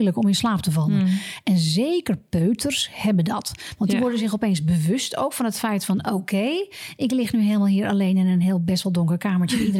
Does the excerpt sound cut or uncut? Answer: uncut